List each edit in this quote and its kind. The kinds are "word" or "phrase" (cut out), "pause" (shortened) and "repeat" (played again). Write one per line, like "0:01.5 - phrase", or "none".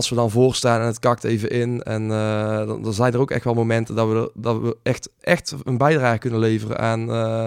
none